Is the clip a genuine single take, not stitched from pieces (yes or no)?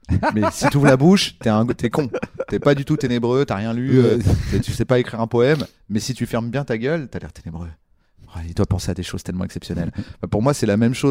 yes